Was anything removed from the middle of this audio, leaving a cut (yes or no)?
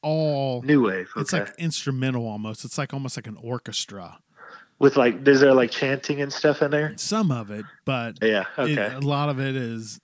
yes